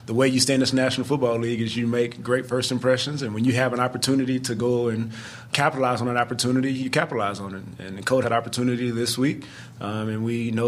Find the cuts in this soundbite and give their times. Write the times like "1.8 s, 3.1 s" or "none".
5.5 s, 8.2 s